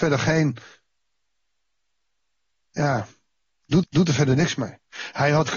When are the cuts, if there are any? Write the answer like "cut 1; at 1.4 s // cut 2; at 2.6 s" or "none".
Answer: cut 1; at 3.8 s